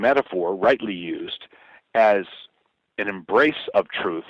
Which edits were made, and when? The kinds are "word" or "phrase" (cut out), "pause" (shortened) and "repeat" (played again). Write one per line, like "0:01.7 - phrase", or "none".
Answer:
none